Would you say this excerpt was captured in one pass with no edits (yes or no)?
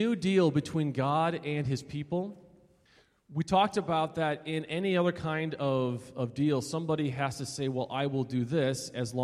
no